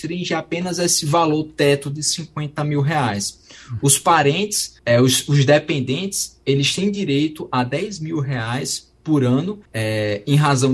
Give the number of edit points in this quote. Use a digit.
2